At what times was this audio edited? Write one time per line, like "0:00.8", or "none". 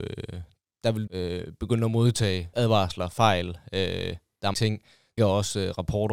0:01.1
0:02.5
0:04.5
0:05.2